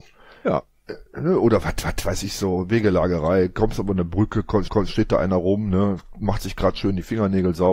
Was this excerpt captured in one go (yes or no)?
no